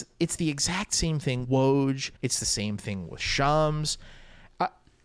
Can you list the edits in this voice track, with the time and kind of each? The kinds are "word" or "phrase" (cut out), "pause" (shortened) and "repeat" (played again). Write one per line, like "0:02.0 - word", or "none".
0:01.4 - word
0:02.2 - pause